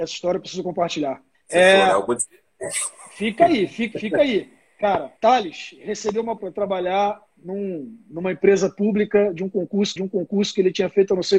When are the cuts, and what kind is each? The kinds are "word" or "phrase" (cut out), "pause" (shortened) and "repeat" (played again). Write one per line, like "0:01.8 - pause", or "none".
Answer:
0:01.3 - pause
0:03.9 - word
0:05.2 - pause
0:06.4 - word
0:10.0 - repeat